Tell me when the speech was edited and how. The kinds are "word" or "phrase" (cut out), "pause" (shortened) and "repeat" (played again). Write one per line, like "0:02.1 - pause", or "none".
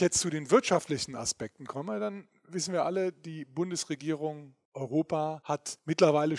none